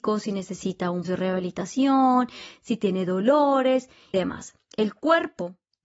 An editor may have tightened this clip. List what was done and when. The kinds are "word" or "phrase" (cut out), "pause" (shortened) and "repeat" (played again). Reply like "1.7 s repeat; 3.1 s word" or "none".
1.0 s word; 4.1 s word